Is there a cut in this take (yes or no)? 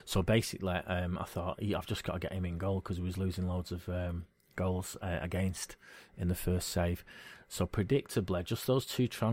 no